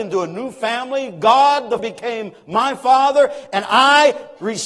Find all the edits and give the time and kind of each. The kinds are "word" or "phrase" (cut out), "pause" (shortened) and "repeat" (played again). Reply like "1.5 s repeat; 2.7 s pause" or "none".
1.8 s word